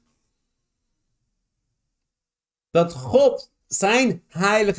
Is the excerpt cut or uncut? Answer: cut